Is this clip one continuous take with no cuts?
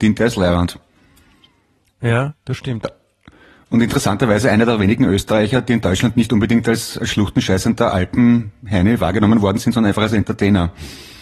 yes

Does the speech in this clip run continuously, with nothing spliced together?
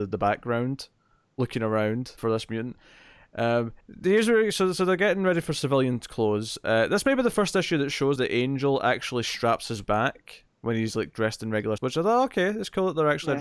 no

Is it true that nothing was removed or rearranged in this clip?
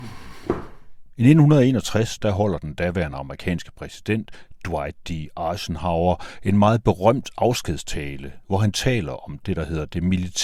yes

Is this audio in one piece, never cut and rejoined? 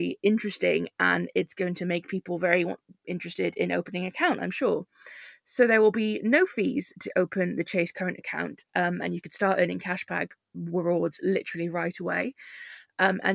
yes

